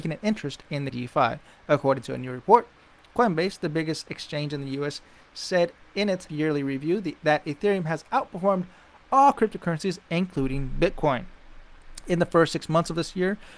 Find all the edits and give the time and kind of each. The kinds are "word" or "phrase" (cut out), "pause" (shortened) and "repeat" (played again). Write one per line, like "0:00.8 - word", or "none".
0:00.9 - phrase
0:06.3 - word